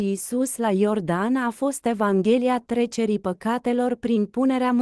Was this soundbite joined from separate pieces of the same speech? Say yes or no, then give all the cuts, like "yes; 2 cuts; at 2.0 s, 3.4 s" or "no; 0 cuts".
no; 0 cuts